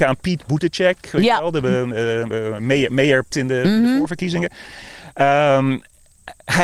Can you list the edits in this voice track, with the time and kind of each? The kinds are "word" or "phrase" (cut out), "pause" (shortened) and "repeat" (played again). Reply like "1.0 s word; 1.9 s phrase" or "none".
3.3 s word